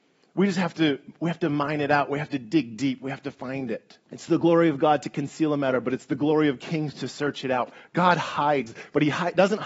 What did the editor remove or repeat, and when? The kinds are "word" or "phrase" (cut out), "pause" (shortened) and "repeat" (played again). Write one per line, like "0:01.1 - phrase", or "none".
0:04.0 - pause